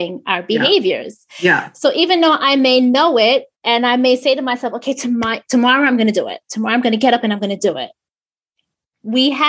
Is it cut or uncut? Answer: cut